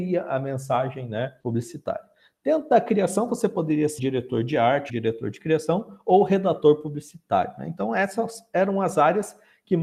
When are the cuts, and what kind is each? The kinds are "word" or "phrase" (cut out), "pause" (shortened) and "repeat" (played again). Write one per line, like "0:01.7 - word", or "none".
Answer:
0:01.4 - pause
0:04.0 - word
0:04.9 - word